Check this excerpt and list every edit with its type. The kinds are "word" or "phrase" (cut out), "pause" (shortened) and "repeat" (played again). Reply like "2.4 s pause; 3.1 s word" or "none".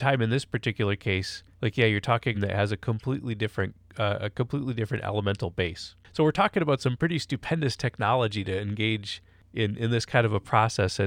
1.5 s pause; 2.3 s phrase; 3.8 s pause; 6.0 s pause